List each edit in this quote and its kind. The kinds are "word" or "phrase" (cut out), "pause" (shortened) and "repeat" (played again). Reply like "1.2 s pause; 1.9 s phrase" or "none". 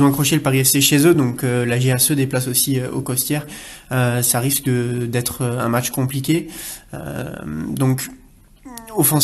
none